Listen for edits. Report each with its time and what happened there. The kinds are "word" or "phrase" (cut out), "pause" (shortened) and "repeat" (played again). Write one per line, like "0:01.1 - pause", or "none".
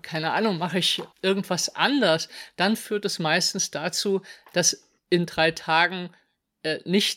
0:01.1 - pause
0:05.0 - pause